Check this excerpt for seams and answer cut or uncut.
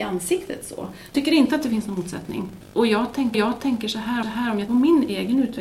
cut